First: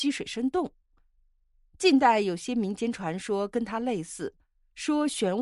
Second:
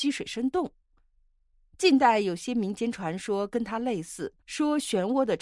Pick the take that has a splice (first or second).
second